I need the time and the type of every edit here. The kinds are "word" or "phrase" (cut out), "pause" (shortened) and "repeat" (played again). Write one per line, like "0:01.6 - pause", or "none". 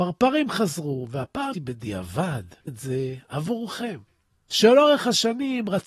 0:01.5 - word
0:02.7 - word